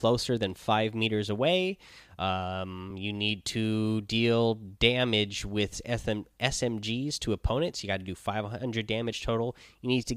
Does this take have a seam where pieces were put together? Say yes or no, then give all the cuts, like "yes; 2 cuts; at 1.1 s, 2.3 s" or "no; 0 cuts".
no; 0 cuts